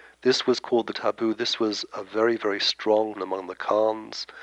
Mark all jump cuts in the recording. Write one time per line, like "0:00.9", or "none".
0:00.9
0:01.9
0:03.1